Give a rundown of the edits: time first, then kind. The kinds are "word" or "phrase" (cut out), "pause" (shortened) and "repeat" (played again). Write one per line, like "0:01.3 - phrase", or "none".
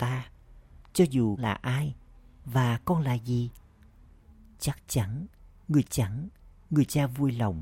0:01.4 - word
0:05.8 - repeat